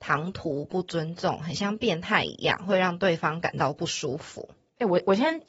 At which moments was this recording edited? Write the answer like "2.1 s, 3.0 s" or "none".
none